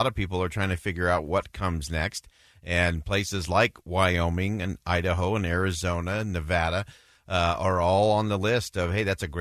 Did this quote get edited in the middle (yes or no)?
no